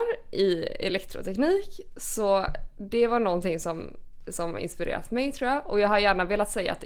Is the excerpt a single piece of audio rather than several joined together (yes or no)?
yes